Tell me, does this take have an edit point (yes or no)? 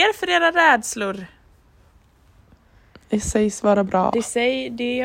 no